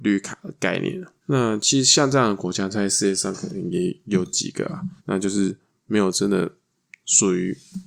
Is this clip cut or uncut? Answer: cut